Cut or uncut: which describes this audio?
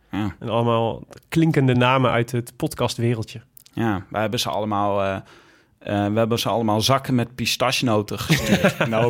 uncut